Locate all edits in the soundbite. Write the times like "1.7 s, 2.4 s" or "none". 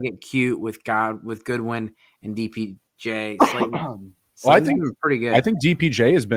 none